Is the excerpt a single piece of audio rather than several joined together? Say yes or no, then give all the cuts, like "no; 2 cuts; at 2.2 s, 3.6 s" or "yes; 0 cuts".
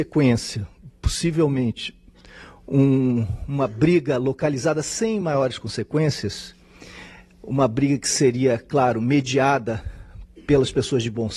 yes; 0 cuts